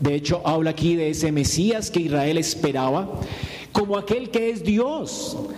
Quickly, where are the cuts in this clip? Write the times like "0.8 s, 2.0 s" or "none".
none